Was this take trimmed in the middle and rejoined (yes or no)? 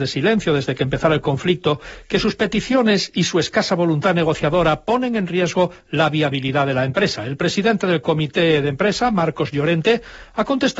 no